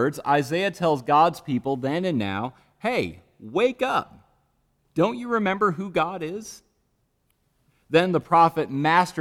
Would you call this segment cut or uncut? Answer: uncut